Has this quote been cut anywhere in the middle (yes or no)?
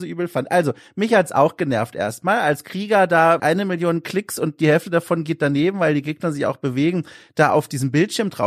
yes